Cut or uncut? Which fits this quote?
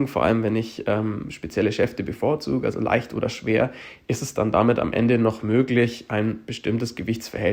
uncut